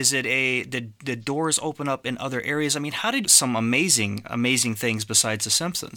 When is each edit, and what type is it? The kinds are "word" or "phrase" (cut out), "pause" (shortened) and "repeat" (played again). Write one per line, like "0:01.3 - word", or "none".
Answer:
0:03.2 - phrase